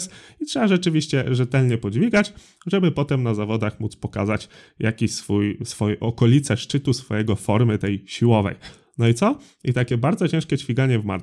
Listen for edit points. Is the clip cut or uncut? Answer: uncut